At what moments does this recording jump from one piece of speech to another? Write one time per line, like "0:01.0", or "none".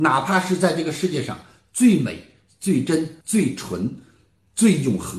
0:03.2